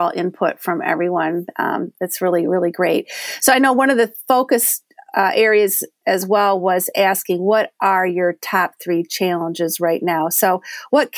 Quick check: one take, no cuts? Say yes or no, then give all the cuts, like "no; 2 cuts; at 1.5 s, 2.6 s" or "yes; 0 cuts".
yes; 0 cuts